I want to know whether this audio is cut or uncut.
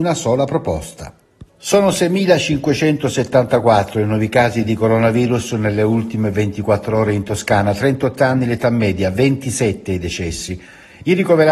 cut